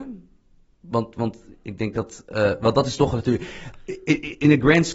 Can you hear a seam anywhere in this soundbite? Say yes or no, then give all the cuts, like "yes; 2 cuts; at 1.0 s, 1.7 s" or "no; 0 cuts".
no; 0 cuts